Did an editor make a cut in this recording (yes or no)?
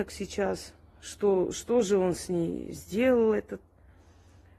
no